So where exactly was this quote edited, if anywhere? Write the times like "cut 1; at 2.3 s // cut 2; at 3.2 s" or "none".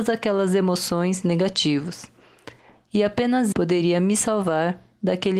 cut 1; at 1.2 s // cut 2; at 3.5 s

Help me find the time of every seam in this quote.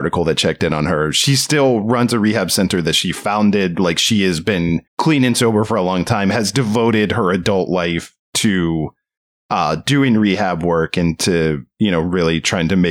cut 1; at 4.9 s

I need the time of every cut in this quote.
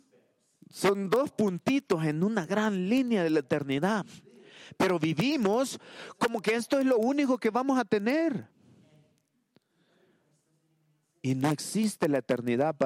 none

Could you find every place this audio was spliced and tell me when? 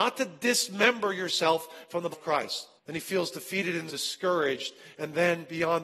cut 1; at 2.1 s // cut 2; at 2.8 s // cut 3; at 3.9 s

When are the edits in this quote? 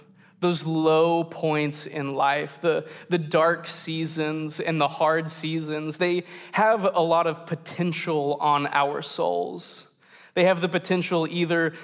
none

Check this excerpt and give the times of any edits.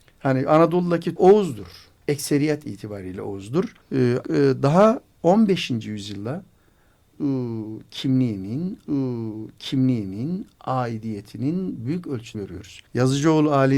cut 1; at 1.2 s // cut 2; at 2.0 s // cut 3; at 3.8 s // cut 4; at 4.2 s // cut 5; at 7.1 s // cut 6; at 8.8 s // cut 7; at 12.3 s // cut 8; at 12.9 s

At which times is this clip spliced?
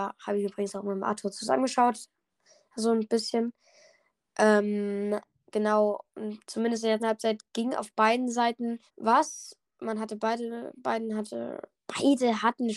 cut 1; at 6.4 s // cut 2; at 7.0 s // cut 3; at 8.9 s

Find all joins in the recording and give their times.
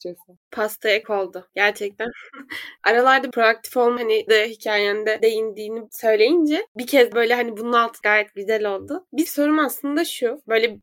cut 1; at 1.0 s // cut 2; at 3.3 s // cut 3; at 4.0 s // cut 4; at 4.3 s // cut 5; at 5.2 s // cut 6; at 7.1 s // cut 7; at 8.0 s // cut 8; at 9.3 s

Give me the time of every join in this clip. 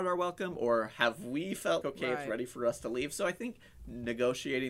cut 1; at 1.8 s

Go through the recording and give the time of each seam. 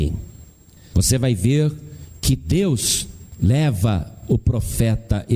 cut 1; at 3.3 s

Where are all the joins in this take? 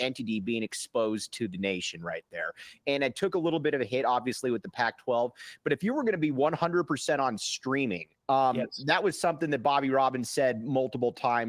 cut 1; at 8.2 s

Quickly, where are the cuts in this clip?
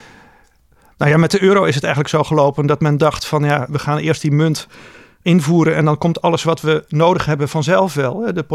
cut 1; at 3.7 s

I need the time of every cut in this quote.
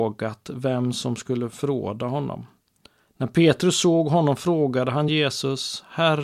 none

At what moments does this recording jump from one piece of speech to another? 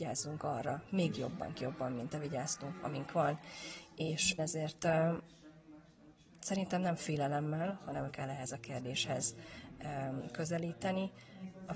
cut 1; at 1.5 s // cut 2; at 2.1 s // cut 3; at 4.4 s // cut 4; at 8.1 s

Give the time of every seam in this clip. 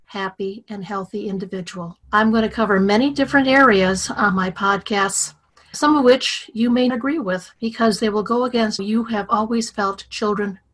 cut 1; at 2.0 s // cut 2; at 5.7 s // cut 3; at 6.9 s // cut 4; at 7.6 s // cut 5; at 8.8 s

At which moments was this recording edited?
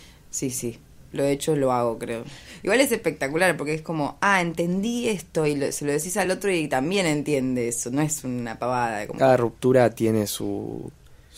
none

